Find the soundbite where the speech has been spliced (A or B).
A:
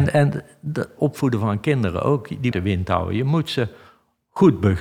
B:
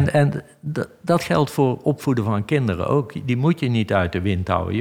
A